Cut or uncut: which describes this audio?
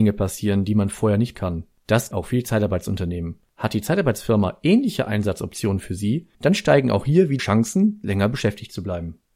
cut